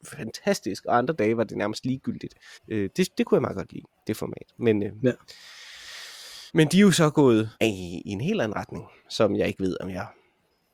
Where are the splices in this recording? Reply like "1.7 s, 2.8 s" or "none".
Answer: 2.5 s, 6.5 s, 7.5 s